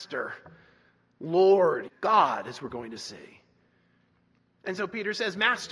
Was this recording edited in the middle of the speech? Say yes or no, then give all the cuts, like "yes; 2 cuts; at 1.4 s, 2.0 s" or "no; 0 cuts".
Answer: yes; 1 cut; at 1.9 s